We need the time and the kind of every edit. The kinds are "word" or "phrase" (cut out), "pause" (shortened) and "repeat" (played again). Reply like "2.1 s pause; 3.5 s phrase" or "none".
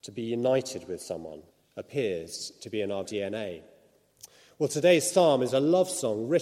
1.5 s pause; 3.0 s word

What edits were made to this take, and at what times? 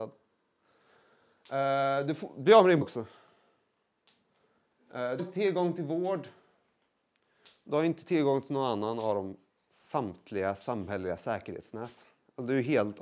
2.8 s word; 5.2 s word

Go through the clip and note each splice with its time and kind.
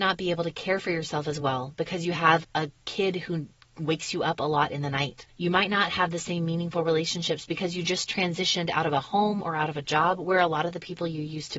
none

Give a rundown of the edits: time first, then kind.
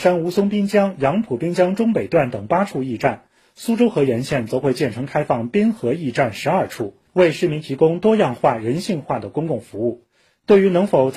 none

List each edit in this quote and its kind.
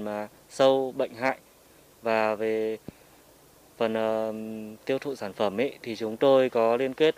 none

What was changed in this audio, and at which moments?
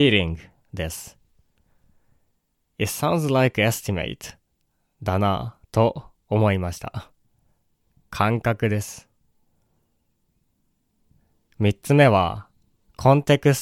none

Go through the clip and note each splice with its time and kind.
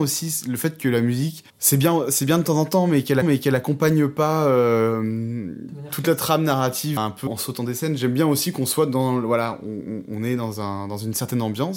1.5 s pause; 3.2 s repeat; 7.0 s word; 7.3 s word

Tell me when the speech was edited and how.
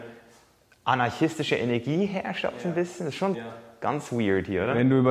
3.3 s word

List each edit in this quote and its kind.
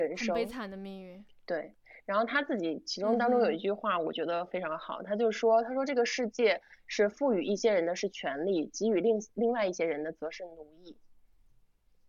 none

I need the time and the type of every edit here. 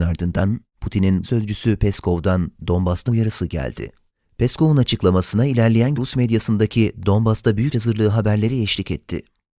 1.2 s word; 3.1 s word; 4.1 s pause; 6.0 s word; 7.7 s word

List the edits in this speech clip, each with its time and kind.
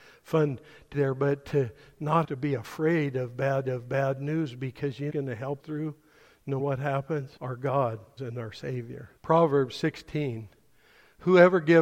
0.9 s word; 2.2 s word; 3.6 s repeat; 5.1 s phrase; 5.6 s word; 6.6 s word; 7.4 s pause; 8.2 s word; 9.2 s pause

